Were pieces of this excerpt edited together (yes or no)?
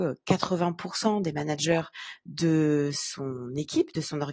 no